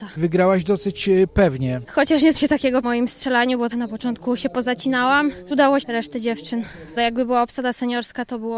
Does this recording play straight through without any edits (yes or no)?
no